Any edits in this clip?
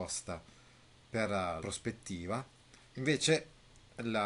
yes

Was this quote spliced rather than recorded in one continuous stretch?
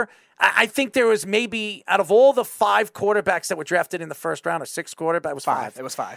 no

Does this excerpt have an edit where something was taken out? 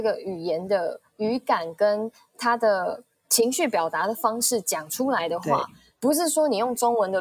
no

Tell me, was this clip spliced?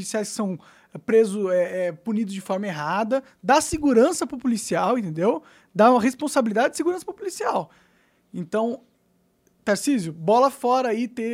no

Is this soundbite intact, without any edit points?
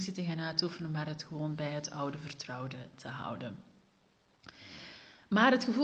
yes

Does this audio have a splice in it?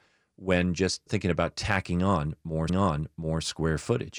yes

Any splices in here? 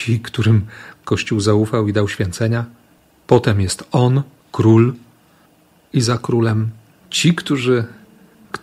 no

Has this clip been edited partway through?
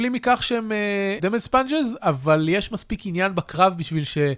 yes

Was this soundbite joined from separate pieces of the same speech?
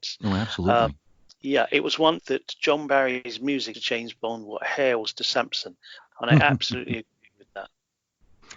yes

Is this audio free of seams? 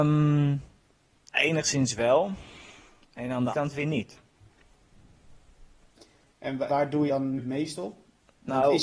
no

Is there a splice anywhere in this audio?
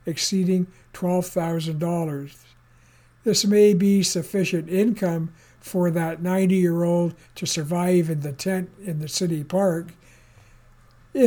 no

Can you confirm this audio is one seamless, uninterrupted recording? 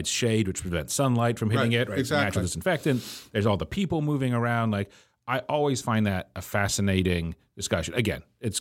yes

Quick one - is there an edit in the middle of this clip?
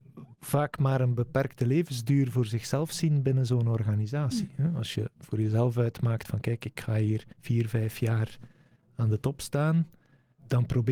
yes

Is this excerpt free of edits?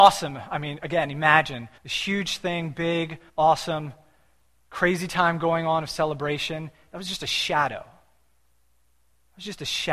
no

